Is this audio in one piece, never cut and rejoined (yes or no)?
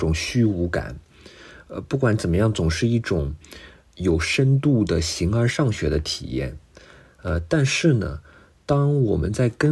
yes